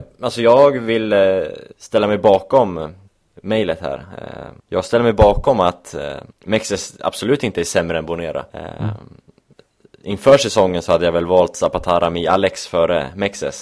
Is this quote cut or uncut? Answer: cut